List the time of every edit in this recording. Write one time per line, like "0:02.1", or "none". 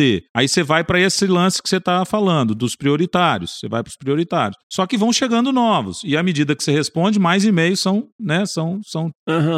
none